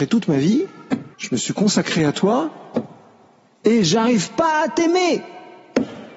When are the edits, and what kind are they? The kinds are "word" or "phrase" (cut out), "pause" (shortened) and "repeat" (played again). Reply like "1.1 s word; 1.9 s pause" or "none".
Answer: 1.1 s pause